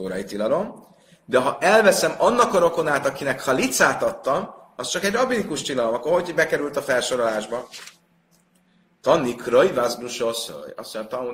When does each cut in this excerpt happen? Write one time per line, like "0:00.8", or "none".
none